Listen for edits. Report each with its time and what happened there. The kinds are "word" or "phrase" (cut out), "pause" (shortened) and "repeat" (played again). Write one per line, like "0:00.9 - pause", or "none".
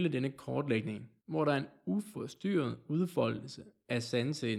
0:01.2 - pause